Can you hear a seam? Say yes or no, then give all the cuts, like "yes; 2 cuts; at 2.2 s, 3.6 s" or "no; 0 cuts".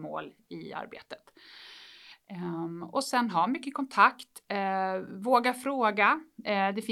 no; 0 cuts